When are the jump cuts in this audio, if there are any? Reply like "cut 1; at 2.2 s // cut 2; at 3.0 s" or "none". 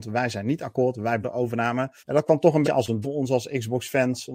cut 1; at 1.2 s // cut 2; at 2.0 s // cut 3; at 2.6 s // cut 4; at 3.0 s